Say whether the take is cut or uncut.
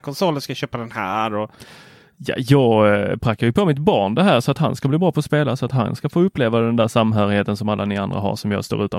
uncut